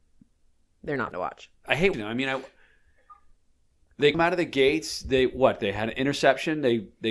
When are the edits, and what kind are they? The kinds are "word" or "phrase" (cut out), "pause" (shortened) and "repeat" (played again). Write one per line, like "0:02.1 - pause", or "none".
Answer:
0:01.1 - word
0:01.9 - word
0:04.1 - word